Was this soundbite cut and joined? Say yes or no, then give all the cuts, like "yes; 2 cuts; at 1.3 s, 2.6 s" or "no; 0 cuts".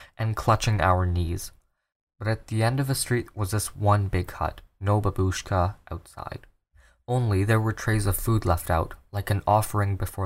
no; 0 cuts